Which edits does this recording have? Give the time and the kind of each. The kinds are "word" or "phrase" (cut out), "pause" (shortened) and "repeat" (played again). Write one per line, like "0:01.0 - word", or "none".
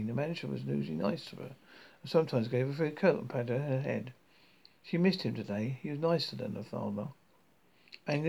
none